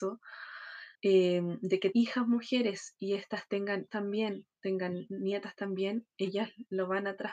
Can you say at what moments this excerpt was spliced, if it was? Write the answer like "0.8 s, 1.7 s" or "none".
0.9 s, 1.9 s, 3.9 s, 4.6 s